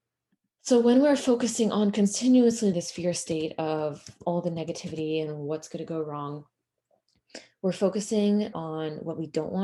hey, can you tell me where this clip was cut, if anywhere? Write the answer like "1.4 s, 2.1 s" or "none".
2.7 s, 8.5 s